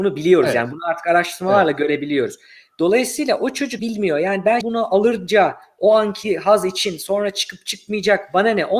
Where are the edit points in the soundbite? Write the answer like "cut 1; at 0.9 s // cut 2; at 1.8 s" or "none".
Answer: cut 1; at 3.8 s // cut 2; at 4.6 s